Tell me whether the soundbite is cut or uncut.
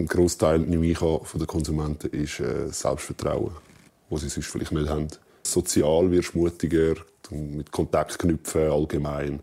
uncut